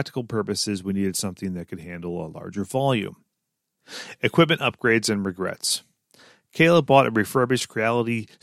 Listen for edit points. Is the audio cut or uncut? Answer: uncut